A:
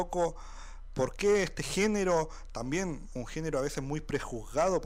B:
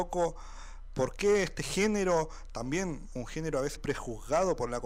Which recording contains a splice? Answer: B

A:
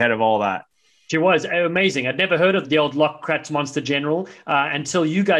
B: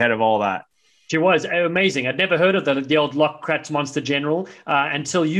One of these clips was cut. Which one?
A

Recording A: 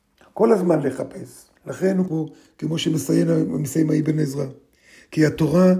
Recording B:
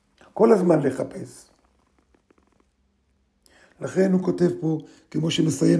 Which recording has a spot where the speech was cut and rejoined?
A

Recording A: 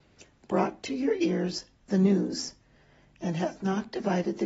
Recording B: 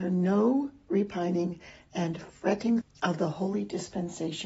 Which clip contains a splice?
B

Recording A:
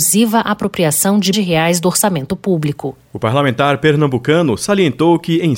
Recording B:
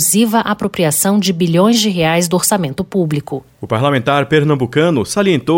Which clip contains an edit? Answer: A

